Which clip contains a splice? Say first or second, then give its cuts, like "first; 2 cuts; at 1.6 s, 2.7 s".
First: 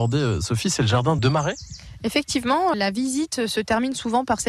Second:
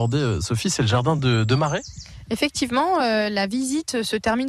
first; 2 cuts; at 1.2 s, 2.7 s